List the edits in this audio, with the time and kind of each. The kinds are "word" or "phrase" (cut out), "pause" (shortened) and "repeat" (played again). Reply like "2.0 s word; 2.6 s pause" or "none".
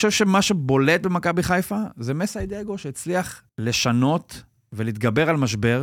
3.5 s pause